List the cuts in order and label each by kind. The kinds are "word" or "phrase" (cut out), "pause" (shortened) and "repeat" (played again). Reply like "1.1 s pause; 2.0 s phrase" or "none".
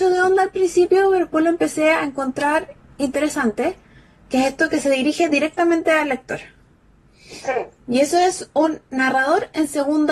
none